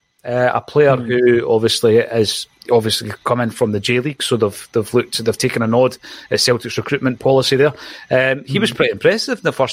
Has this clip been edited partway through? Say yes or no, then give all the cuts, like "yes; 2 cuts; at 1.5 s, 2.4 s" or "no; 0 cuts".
yes; 1 cut; at 2.6 s